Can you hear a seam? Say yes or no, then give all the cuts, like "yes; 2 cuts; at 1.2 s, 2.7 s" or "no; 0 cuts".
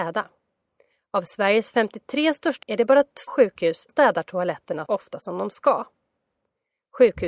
yes; 4 cuts; at 2.6 s, 3.3 s, 3.9 s, 4.9 s